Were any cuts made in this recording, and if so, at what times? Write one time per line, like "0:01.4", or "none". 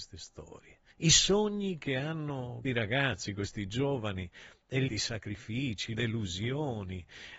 0:00.9
0:02.6
0:04.9
0:05.9